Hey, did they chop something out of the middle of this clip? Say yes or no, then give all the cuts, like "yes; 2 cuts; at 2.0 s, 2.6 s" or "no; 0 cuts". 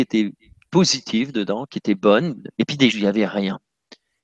yes; 2 cuts; at 2.5 s, 2.9 s